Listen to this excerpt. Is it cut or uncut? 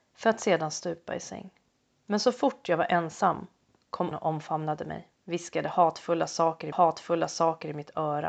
cut